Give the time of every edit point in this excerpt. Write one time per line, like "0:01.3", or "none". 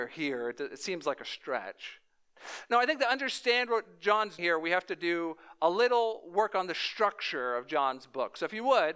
0:04.4